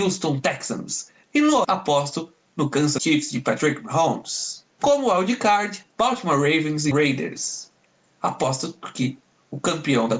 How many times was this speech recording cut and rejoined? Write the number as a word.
four